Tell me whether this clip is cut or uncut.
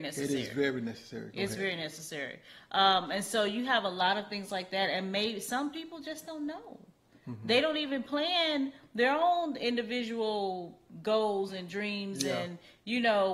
uncut